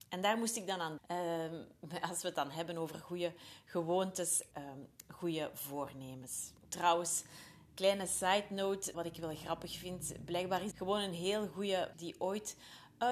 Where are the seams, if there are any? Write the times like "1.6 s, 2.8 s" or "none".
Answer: 1.0 s, 4.5 s, 6.6 s, 8.9 s, 10.7 s, 11.9 s